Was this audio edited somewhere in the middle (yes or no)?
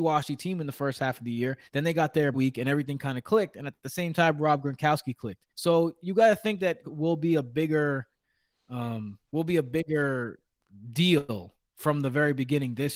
yes